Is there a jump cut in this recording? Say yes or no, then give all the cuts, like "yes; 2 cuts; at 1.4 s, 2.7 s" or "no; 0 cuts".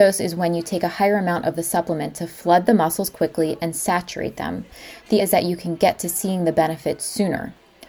yes; 1 cut; at 5.2 s